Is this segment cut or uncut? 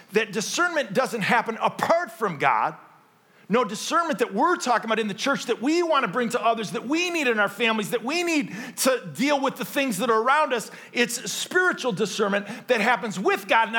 uncut